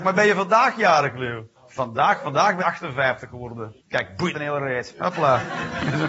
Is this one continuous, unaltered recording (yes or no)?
no